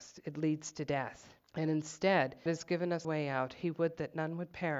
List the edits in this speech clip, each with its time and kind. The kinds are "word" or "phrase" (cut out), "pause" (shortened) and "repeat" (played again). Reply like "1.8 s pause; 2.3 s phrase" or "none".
1.5 s pause; 2.5 s word; 3.0 s word